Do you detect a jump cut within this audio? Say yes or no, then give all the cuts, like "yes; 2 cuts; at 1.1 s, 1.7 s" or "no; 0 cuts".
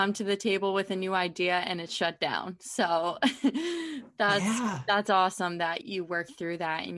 yes; 1 cut; at 5.8 s